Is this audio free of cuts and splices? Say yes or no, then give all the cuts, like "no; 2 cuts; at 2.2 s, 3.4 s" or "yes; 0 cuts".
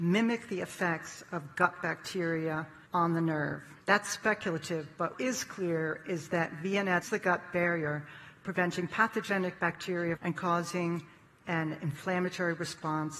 no; 5 cuts; at 2.9 s, 3.8 s, 5.1 s, 7.0 s, 10.2 s